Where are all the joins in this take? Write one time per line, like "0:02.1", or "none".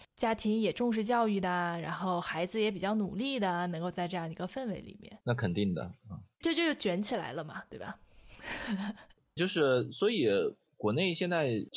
0:05.2
0:06.4
0:09.4

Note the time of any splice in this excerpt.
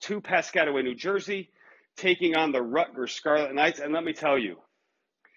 none

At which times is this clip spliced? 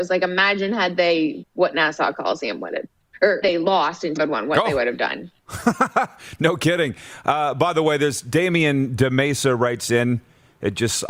0:01.4
0:03.4
0:04.2

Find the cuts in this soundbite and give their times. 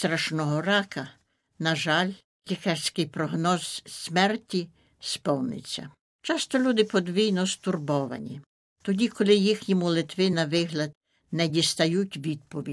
none

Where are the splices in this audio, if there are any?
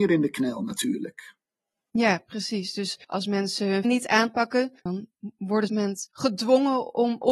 0:03.0
0:03.8
0:04.8
0:05.7
0:06.1

